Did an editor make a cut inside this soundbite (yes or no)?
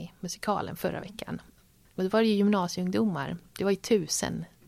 no